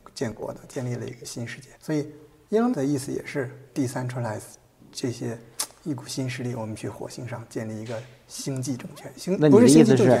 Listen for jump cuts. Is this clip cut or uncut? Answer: cut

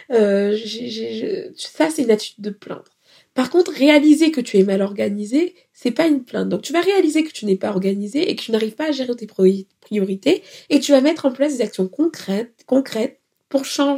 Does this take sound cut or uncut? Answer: uncut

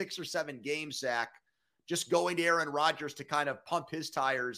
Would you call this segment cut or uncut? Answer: uncut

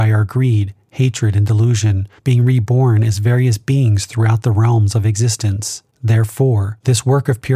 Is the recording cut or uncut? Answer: cut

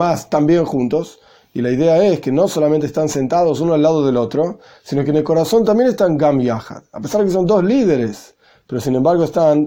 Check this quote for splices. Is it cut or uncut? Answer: uncut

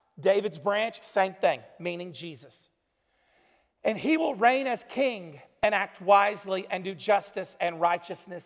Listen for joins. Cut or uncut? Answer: uncut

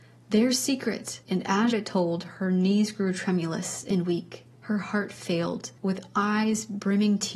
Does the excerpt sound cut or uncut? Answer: cut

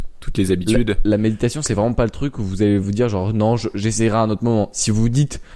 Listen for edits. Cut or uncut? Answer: uncut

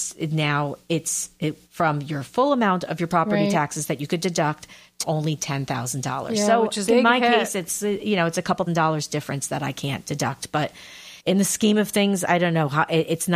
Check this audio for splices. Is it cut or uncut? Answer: cut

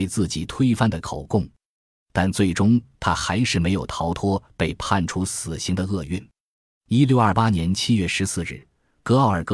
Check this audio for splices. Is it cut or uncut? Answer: uncut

